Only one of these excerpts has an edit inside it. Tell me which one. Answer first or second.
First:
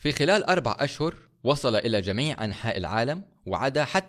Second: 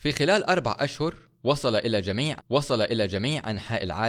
second